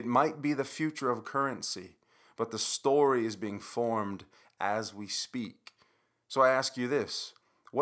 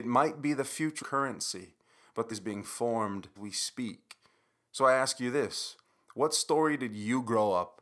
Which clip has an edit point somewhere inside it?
second; 3 cuts; at 1.0 s, 2.3 s, 3.4 s

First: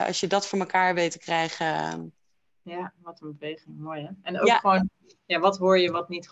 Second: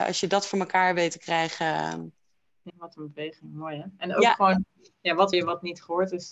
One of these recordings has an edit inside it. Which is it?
second; 2 cuts; at 2.7 s, 5.3 s

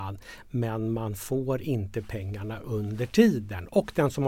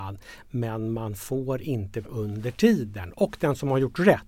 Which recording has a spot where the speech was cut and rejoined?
second; 1 cut; at 2.0 s

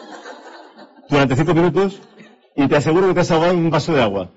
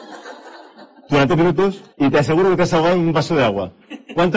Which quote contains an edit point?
second; 2 cuts; at 1.3 s, 1.9 s

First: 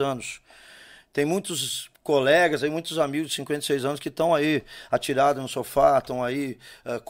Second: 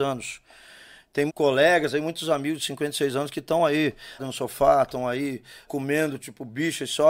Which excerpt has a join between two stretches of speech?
second; 3 cuts; at 1.3 s, 4.2 s, 5.7 s

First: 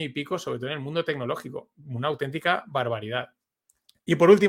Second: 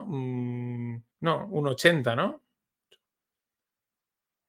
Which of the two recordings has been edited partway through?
second; 1 cut; at 1.1 s

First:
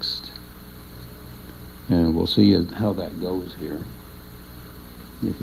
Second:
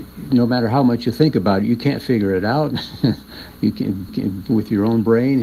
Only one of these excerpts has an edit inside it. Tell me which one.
second; 1 cut; at 4.1 s

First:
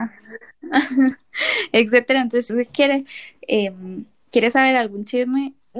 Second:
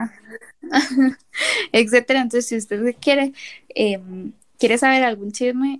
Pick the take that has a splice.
first; 1 cut; at 2.5 s

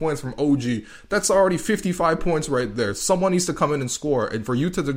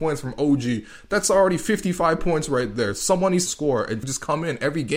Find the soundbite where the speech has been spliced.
second; 2 cuts; at 3.5 s, 4.0 s

